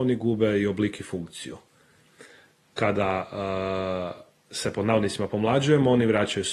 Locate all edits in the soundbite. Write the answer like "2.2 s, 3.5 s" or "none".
none